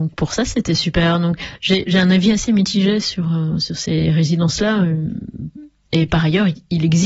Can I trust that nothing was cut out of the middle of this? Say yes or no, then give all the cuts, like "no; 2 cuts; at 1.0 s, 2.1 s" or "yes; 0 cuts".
yes; 0 cuts